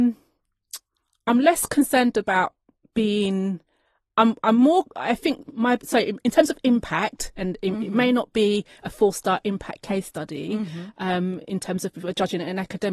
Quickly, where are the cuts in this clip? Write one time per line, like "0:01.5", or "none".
none